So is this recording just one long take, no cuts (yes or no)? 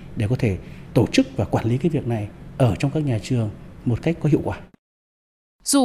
yes